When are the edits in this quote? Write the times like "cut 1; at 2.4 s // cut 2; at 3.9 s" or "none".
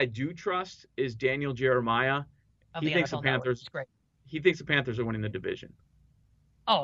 cut 1; at 3.9 s